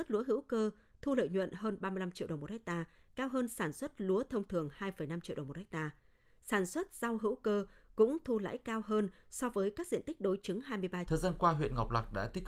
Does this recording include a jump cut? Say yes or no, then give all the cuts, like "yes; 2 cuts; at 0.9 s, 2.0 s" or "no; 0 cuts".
yes; 1 cut; at 11.1 s